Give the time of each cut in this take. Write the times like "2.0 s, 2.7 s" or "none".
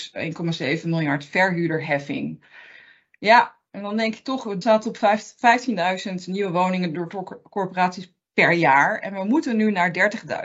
4.6 s